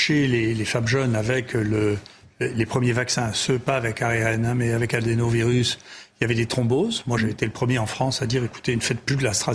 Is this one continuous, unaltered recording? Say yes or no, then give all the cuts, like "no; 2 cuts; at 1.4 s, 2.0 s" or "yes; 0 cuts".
yes; 0 cuts